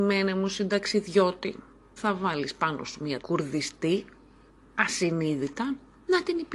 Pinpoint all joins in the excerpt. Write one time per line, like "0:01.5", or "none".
0:02.0
0:03.2